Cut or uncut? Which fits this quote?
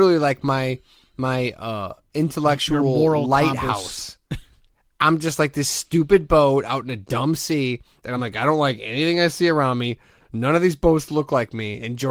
uncut